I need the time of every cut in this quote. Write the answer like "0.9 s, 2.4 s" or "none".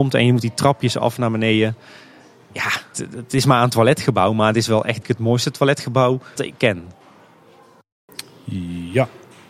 2.9 s, 5.0 s, 6.4 s